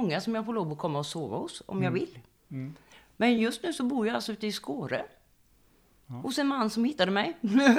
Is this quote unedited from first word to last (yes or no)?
yes